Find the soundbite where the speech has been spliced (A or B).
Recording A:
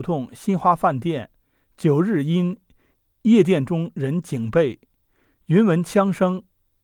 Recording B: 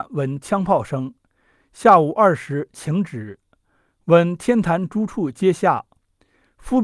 A